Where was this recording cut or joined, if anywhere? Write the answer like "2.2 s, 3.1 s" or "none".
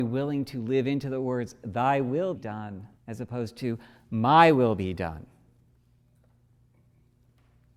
2.4 s, 3.0 s